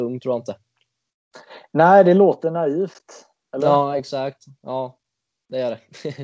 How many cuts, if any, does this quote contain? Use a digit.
1